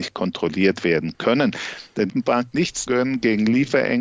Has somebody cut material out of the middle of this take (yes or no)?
yes